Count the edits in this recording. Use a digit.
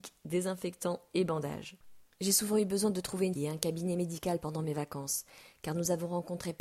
2